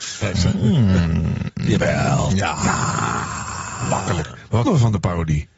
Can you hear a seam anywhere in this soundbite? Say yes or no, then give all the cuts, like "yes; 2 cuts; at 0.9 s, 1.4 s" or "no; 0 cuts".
yes; 1 cut; at 4.7 s